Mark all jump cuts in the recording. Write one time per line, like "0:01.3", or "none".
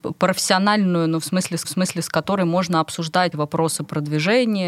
0:01.6
0:03.3

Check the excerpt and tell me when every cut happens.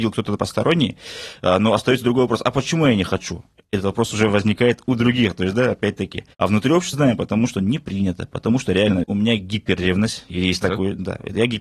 0:06.3
0:06.9
0:09.0

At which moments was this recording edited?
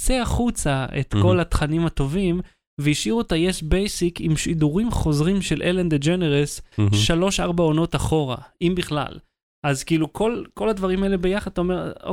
none

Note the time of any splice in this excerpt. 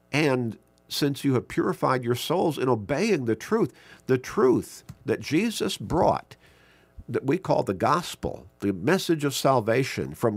0:07.0

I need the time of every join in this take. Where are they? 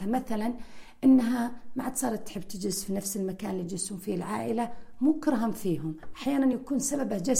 none

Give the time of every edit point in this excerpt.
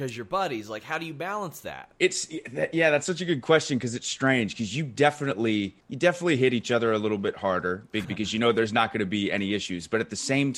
0:02.0
0:05.8
0:08.0

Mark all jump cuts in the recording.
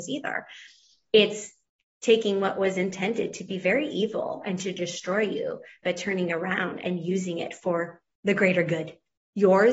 0:01.8

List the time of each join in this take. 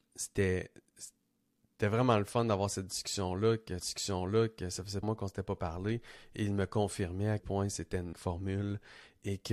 0:03.8
0:05.0
0:07.4
0:08.1

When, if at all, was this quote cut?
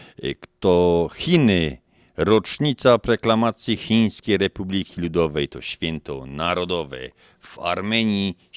none

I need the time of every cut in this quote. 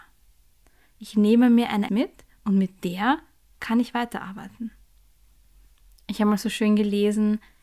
0:01.9

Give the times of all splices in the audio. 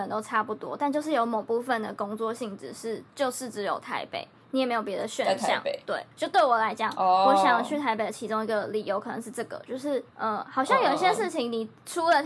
0:06.1
0:10.1

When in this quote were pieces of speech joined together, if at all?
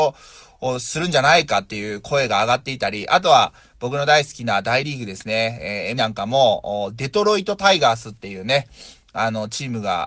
0:06.0

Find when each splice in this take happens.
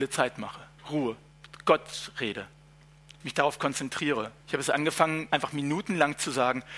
0:04.4
0:05.3

